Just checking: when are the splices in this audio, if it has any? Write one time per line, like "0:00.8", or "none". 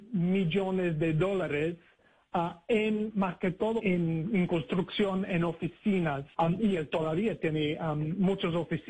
0:03.8
0:06.3